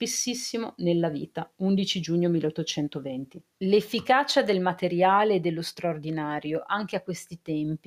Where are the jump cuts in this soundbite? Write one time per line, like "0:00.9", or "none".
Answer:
0:01.5
0:03.5